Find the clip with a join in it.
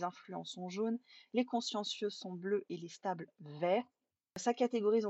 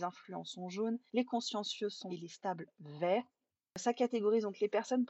second; 2 cuts; at 1.1 s, 2.1 s

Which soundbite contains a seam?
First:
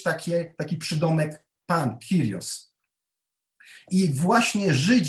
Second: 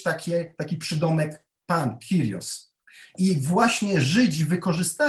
second; 1 cut; at 2.8 s

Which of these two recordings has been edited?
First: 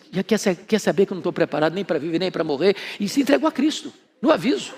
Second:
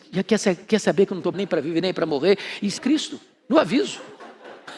second; 2 cuts; at 1.3 s, 2.8 s

